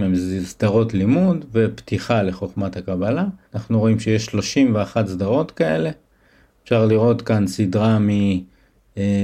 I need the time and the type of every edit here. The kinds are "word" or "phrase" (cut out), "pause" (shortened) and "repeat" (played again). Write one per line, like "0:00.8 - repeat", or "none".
0:03.4 - pause